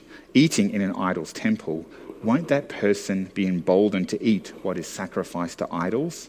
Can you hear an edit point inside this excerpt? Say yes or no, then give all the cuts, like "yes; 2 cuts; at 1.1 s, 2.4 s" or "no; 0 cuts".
no; 0 cuts